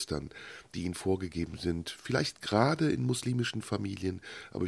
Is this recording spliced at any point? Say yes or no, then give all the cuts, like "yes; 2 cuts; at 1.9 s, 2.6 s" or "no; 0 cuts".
no; 0 cuts